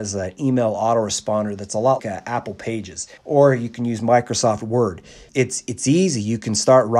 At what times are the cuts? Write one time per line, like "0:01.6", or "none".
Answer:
0:02.0
0:03.2
0:05.3